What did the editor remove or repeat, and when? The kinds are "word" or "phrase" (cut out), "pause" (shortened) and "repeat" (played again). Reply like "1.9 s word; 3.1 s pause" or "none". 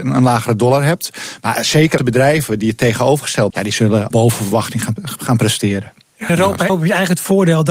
2.0 s word; 3.5 s word; 4.1 s word; 5.0 s word; 6.3 s word; 6.7 s word